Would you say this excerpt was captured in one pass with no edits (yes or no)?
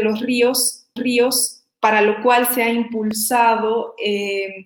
no